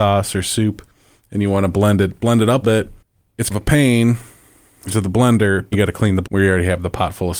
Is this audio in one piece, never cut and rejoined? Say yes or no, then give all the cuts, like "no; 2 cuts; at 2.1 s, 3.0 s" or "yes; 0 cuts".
no; 5 cuts; at 2.6 s, 3.5 s, 4.9 s, 5.7 s, 6.2 s